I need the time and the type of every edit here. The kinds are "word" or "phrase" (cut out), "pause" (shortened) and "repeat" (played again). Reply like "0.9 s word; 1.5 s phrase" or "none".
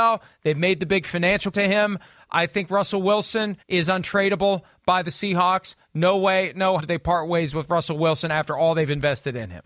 1.5 s word; 3.6 s pause; 6.8 s word